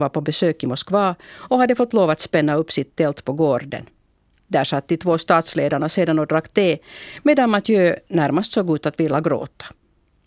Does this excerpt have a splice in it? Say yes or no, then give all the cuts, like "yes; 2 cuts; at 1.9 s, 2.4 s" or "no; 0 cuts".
no; 0 cuts